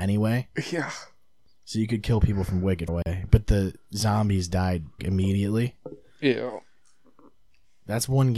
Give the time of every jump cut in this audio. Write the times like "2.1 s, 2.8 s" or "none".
2.9 s, 5.0 s